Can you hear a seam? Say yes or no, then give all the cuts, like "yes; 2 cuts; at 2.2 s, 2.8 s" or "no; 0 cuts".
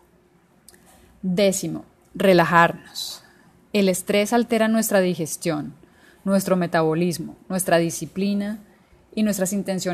no; 0 cuts